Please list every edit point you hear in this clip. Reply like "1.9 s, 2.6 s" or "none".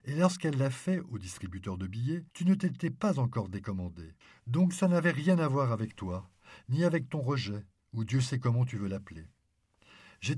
2.3 s, 4.2 s